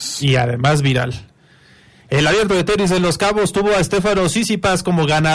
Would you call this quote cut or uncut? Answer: uncut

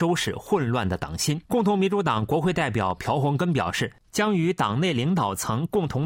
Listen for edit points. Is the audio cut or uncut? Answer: cut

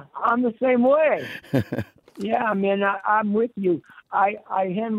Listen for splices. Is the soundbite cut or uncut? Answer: uncut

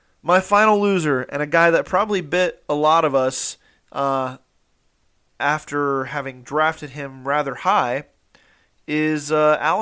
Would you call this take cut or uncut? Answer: uncut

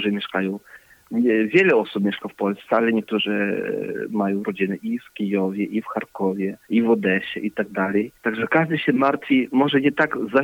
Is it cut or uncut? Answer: cut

